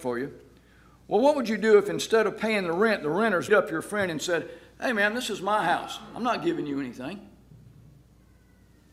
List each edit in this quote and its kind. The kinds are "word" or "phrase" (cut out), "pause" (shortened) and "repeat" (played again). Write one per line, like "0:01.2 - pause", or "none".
0:03.5 - word